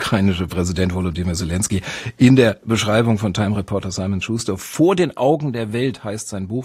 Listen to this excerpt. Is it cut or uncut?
uncut